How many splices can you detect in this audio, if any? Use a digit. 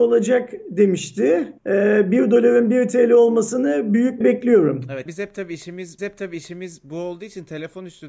4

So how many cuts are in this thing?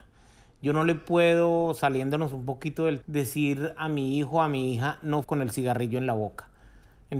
2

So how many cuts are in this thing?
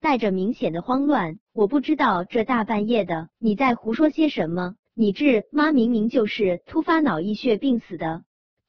3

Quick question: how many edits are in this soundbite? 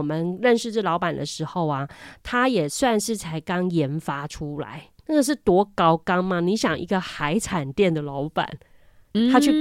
1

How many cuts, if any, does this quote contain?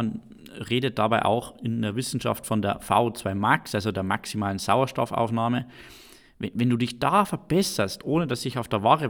1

